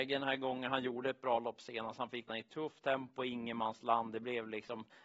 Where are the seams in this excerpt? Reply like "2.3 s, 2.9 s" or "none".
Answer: 2.3 s